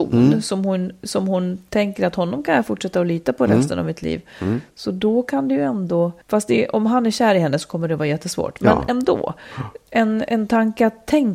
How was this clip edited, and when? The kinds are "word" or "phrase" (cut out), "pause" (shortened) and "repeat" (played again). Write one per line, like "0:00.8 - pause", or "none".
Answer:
0:06.2 - pause